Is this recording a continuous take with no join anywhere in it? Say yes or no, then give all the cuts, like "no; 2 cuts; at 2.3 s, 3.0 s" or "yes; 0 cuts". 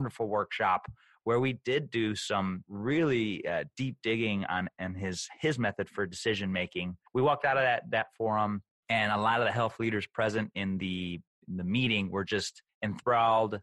no; 1 cut; at 7.1 s